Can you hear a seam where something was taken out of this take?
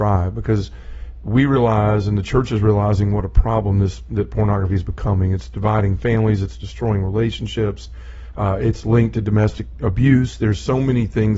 no; 0 cuts

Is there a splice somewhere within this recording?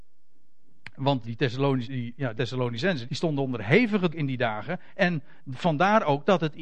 yes; 5 cuts; at 1.2 s, 1.8 s, 2.4 s, 3.0 s, 4.1 s

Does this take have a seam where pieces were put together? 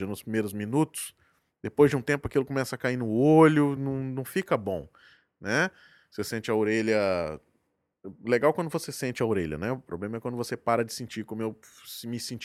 no; 0 cuts

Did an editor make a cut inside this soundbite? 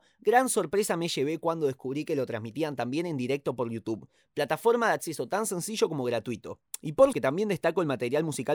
yes; 1 cut; at 7.1 s

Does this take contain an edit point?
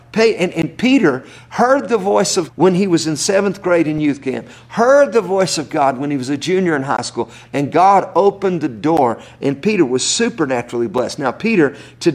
yes; 1 cut; at 2.5 s

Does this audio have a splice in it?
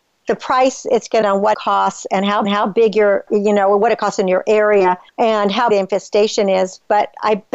yes; 6 cuts; at 1.2 s, 1.5 s, 2.4 s, 3.3 s, 5.1 s, 5.7 s

